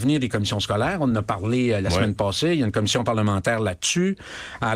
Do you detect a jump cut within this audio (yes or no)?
no